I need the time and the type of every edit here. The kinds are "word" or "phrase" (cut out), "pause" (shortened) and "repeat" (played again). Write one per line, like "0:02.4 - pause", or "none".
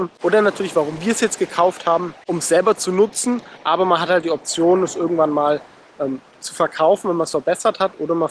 none

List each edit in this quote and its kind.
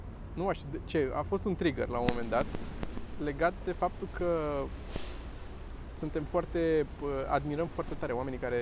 none

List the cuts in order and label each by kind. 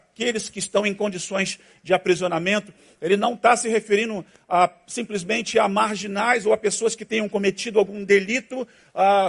none

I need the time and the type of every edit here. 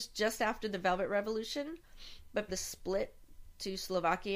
0:02.5 - word

